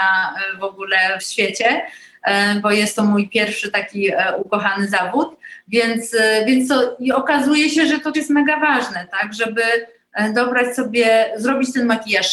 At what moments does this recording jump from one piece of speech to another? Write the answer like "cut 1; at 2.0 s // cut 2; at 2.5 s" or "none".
cut 1; at 1.2 s // cut 2; at 8.1 s